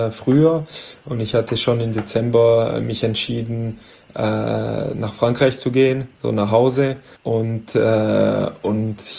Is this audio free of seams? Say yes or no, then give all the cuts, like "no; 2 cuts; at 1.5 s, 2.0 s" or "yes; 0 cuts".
no; 2 cuts; at 6.1 s, 7.2 s